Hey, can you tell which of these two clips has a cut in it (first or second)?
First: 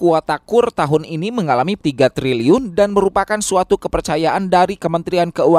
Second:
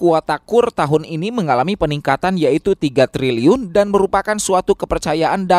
first